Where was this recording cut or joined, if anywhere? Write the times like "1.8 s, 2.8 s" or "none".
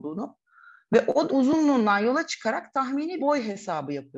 1.3 s, 3.2 s